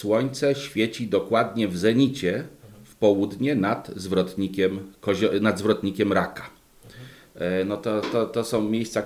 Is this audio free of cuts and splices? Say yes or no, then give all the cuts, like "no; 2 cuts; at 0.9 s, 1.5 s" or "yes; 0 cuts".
yes; 0 cuts